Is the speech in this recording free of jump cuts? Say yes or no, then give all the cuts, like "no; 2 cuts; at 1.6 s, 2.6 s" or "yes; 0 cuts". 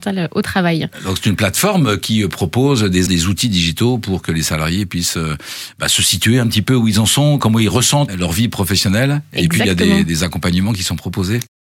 no; 2 cuts; at 3.1 s, 8.1 s